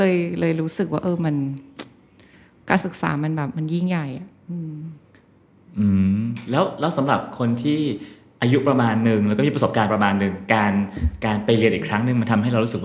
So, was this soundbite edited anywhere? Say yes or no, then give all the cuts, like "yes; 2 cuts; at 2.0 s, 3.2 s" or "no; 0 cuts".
no; 0 cuts